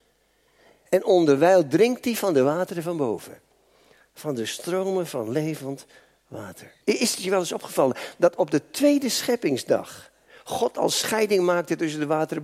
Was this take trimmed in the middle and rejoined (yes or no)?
yes